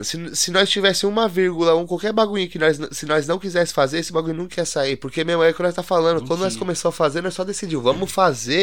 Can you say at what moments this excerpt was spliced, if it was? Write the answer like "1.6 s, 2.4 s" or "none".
none